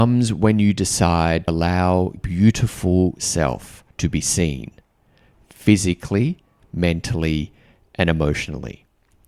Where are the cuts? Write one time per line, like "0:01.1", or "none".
0:01.5
0:02.2
0:03.9